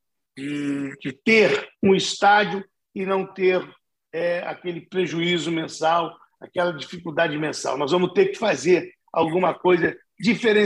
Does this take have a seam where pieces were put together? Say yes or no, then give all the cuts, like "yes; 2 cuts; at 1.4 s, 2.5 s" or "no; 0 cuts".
no; 0 cuts